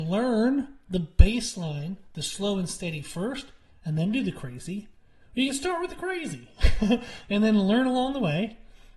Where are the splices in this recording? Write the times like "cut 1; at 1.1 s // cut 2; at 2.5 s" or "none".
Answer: none